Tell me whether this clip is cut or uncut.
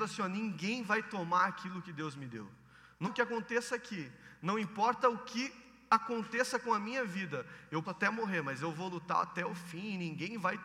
cut